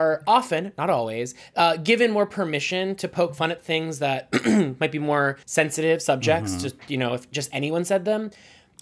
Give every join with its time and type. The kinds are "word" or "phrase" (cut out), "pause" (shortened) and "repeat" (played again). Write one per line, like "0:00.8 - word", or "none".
0:05.4 - pause

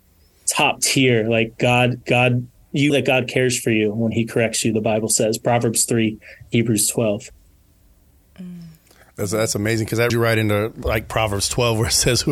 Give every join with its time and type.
0:02.9 - word
0:10.1 - word

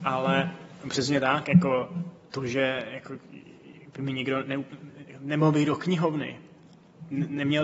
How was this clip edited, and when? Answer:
none

